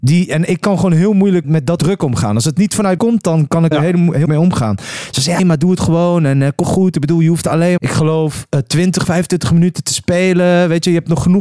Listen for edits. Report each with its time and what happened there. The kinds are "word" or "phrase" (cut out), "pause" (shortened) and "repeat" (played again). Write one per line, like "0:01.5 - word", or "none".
0:01.4 - word
0:01.8 - word
0:03.0 - word
0:03.7 - word
0:04.2 - word
0:05.4 - word
0:06.6 - word
0:07.8 - word
0:09.0 - word